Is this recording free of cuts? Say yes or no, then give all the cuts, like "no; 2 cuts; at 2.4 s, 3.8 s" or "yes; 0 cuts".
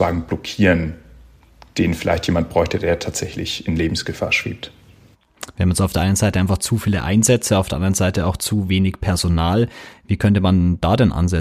yes; 0 cuts